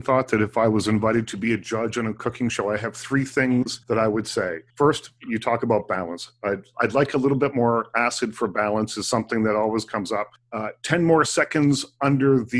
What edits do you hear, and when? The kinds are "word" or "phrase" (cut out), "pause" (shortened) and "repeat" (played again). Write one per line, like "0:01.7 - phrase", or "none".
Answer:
0:03.8 - pause
0:04.7 - pause
0:10.4 - pause